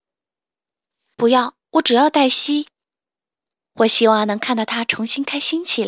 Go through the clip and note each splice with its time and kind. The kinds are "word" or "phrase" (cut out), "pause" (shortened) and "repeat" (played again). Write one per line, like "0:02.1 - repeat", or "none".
0:01.6 - pause
0:02.7 - pause

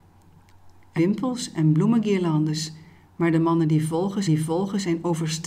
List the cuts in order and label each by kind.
0:01.0 - word
0:04.3 - repeat

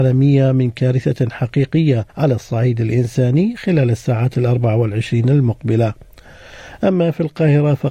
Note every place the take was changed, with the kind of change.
0:02.1 - pause

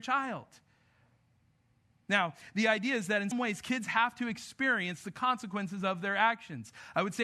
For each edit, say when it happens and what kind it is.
0:03.3 - word

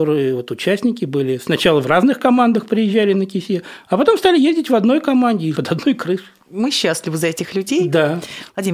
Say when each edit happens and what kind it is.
0:05.5 - word

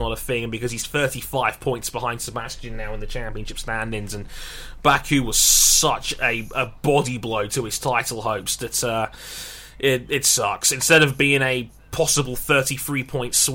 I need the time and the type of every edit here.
none

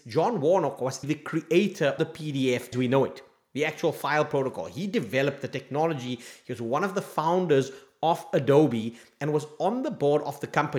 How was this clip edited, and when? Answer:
0:01.0 - word
0:02.0 - word
0:02.7 - word

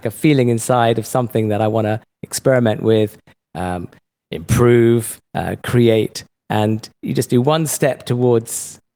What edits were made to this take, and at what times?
0:05.3 - pause
0:06.9 - pause

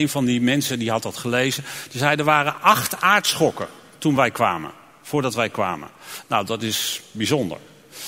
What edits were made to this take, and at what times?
none

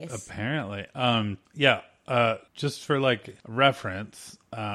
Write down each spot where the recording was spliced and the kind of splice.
0:01.4 - pause
0:02.5 - pause
0:03.4 - pause

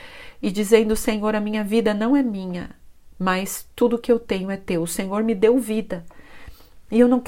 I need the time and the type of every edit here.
0:03.1 - pause

